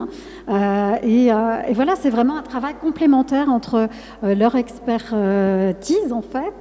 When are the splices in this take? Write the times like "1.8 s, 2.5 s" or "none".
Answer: none